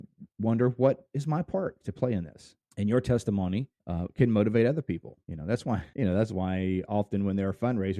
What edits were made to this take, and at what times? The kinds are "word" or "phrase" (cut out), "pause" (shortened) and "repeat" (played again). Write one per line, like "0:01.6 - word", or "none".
0:02.6 - pause
0:03.8 - pause
0:05.2 - pause
0:05.9 - pause